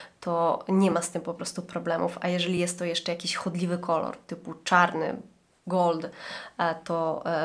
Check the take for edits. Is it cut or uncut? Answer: uncut